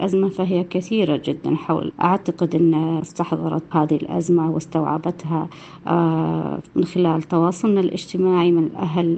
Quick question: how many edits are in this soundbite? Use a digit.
4